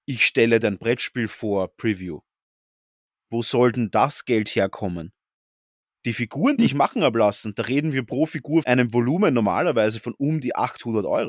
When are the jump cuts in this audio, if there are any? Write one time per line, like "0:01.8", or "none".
0:08.6